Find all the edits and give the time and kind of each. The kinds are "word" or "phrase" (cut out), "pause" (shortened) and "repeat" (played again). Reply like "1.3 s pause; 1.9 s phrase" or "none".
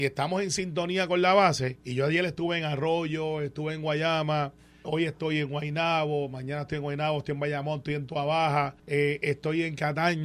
1.8 s pause; 4.8 s word; 8.8 s pause